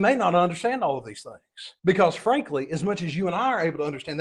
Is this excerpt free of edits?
no; 1 cut; at 1.8 s

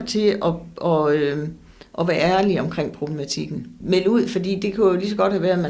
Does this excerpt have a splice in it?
no; 0 cuts

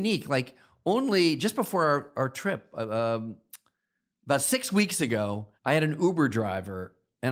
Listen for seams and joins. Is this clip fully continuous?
no; 1 cut; at 5.6 s

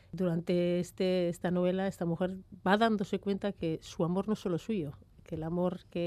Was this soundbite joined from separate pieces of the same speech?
no; 0 cuts

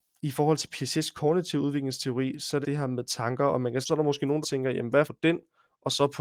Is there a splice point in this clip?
yes; 4 cuts; at 2.6 s, 3.8 s, 4.4 s, 5.0 s

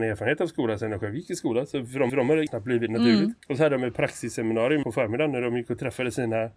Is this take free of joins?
no; 4 cuts; at 2.1 s, 2.5 s, 3.4 s, 4.8 s

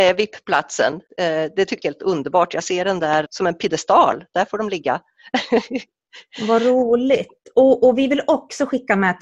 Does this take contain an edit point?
yes; 3 cuts; at 1.1 s, 1.8 s, 3.3 s

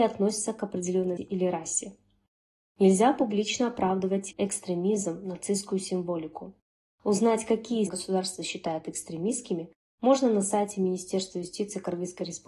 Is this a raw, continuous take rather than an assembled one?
no; 3 cuts; at 1.2 s, 4.3 s, 7.9 s

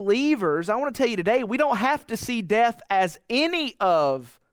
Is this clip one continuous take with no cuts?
yes; 0 cuts

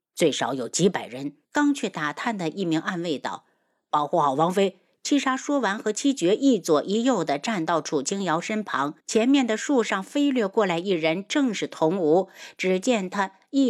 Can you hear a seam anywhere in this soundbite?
yes; 2 cuts; at 1.4 s, 9.0 s

